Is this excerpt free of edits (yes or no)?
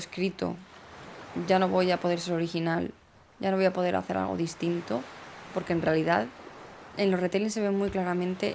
yes